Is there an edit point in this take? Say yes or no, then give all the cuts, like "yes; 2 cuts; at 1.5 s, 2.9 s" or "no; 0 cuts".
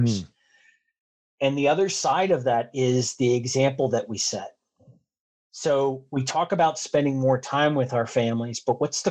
no; 0 cuts